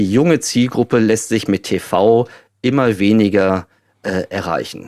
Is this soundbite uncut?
yes; 0 cuts

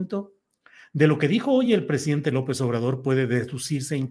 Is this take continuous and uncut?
yes; 0 cuts

